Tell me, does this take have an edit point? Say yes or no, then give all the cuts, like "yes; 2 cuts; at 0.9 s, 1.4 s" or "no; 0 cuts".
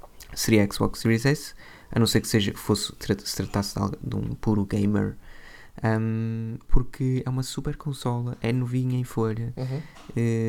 no; 0 cuts